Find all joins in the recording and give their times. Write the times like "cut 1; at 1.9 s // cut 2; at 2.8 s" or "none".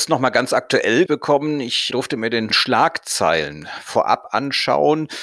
cut 1; at 1.1 s // cut 2; at 2.5 s